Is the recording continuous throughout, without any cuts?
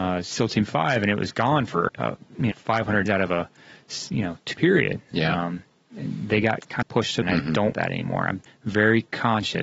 no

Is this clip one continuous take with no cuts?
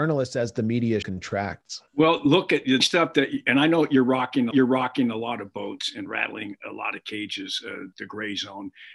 no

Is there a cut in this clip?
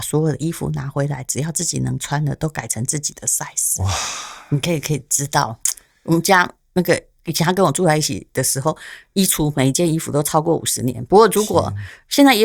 no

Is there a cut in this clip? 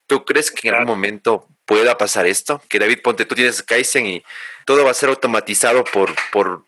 yes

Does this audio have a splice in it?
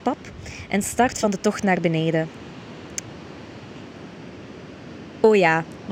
no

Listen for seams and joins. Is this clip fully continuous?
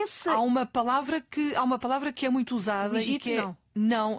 yes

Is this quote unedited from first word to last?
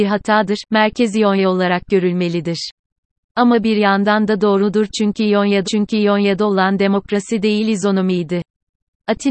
no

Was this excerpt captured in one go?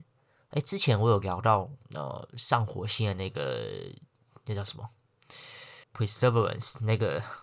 no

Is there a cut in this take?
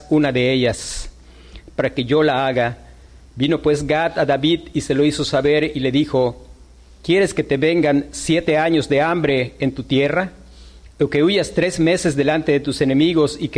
no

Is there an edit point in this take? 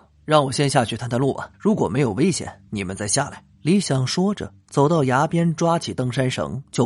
yes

